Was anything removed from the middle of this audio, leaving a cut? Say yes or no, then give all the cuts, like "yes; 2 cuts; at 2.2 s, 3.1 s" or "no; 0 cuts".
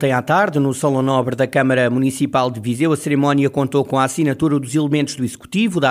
no; 0 cuts